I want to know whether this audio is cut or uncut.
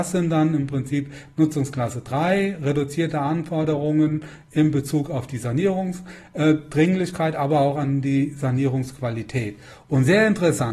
uncut